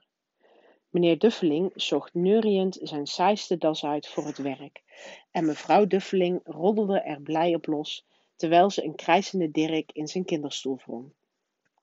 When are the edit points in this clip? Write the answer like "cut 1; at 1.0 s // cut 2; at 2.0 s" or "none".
none